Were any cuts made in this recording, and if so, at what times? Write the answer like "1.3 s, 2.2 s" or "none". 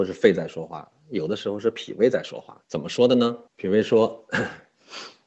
2.6 s, 3.5 s